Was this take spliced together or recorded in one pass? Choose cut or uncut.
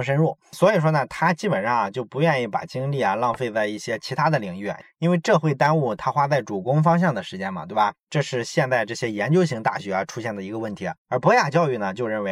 cut